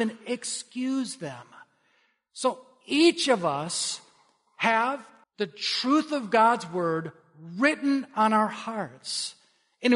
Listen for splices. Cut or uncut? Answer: cut